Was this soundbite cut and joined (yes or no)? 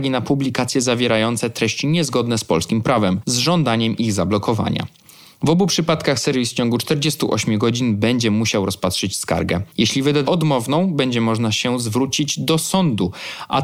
yes